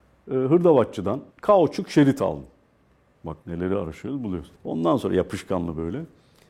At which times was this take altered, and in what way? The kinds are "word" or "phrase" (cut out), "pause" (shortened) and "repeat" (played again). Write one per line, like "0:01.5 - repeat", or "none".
0:01.3 - pause
0:03.4 - pause
0:04.6 - pause

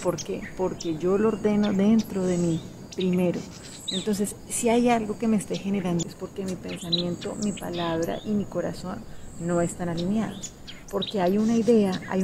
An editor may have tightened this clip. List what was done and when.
0:06.0 - word

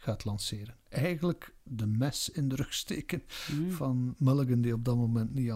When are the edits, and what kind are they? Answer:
0:01.6 - word

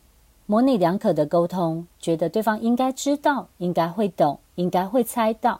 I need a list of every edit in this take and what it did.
0:03.5 - pause
0:04.4 - pause

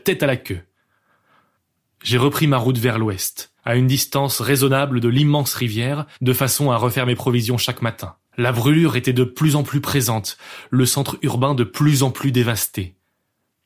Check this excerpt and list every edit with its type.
0:03.6 - pause
0:06.1 - pause
0:08.2 - pause

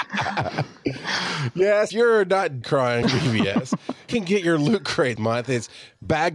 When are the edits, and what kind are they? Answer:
0:01.9 - word
0:02.6 - word
0:03.0 - word
0:04.1 - word
0:05.2 - word

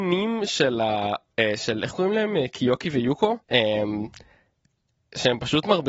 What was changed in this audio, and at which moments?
0:03.4 - pause

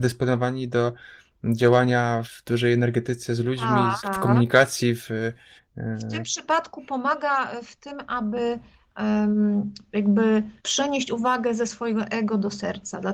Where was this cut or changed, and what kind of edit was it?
0:02.2 - word
0:04.0 - word
0:05.6 - pause
0:10.6 - pause

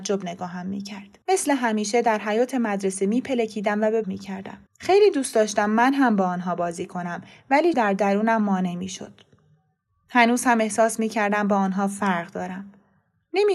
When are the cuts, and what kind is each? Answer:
0:01.2 - pause
0:04.0 - phrase
0:04.7 - pause
0:07.7 - word

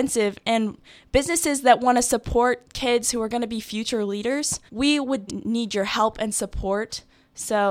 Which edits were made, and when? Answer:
0:04.7 - pause
0:05.3 - word

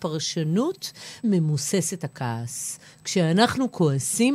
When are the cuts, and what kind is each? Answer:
0:01.2 - word

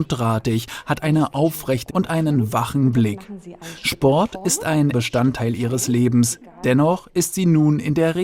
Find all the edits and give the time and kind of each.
0:01.9 - word
0:04.9 - word

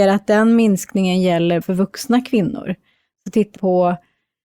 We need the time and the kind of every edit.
0:01.6 - word
0:03.6 - word

